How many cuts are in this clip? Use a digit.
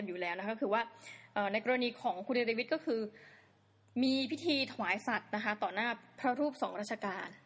0